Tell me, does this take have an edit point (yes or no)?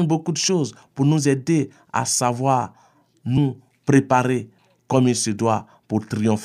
no